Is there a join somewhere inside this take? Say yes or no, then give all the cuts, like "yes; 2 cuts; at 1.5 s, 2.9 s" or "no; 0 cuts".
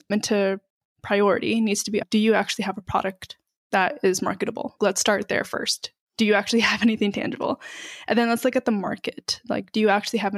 no; 0 cuts